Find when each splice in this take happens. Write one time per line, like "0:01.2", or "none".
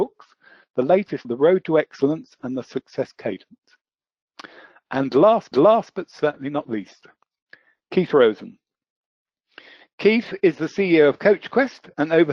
0:01.2
0:05.5